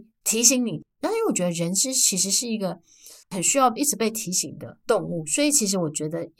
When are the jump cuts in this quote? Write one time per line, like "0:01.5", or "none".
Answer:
0:03.2